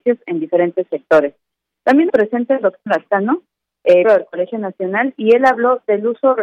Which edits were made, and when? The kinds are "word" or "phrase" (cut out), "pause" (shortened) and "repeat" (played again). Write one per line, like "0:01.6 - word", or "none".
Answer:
0:02.1 - word
0:02.9 - word
0:04.0 - word